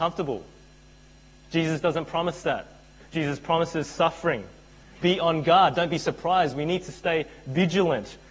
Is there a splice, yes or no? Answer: no